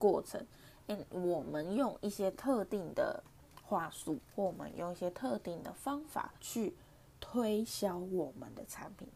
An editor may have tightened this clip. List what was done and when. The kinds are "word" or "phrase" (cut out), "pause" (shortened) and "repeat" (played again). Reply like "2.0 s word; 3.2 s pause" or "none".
4.3 s pause; 6.4 s pause